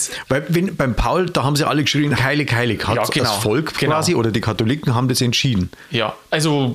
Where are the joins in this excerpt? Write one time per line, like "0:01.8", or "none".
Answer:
0:02.2